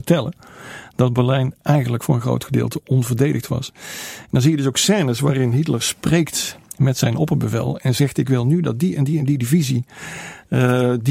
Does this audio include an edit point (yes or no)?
no